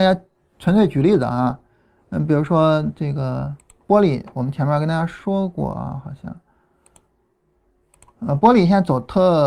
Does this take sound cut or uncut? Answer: uncut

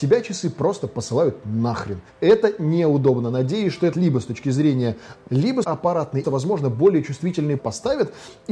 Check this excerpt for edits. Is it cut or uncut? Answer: cut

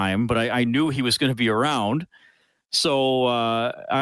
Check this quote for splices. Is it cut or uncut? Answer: uncut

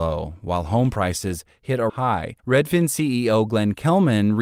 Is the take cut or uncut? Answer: cut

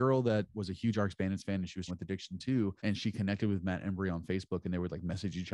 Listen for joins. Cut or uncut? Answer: cut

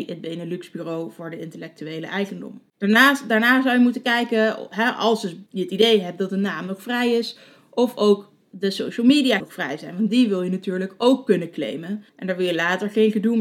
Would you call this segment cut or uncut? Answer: cut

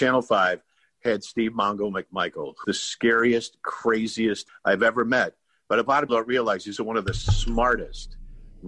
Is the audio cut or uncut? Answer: cut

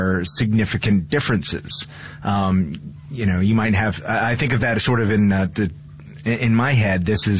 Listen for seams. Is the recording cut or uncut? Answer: uncut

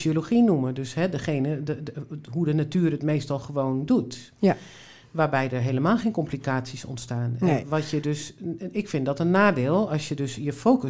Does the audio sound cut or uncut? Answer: uncut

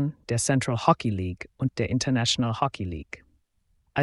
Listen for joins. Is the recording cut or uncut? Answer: cut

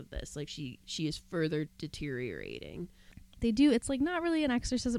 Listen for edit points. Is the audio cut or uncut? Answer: cut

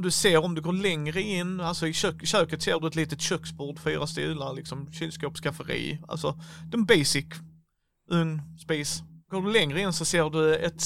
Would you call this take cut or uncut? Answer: cut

